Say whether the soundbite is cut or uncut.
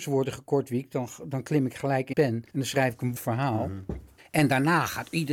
cut